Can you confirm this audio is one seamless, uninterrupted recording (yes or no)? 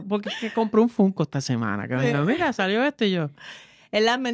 yes